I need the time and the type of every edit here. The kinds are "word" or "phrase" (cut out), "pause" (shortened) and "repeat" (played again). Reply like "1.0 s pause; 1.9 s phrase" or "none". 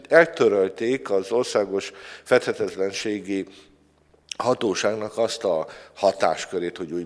none